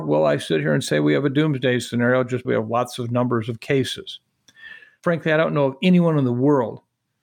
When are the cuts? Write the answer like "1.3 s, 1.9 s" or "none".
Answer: 2.4 s

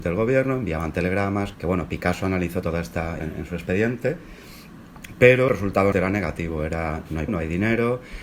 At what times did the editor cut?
1.5 s, 2.6 s, 3.2 s, 5.5 s, 5.9 s, 7.3 s

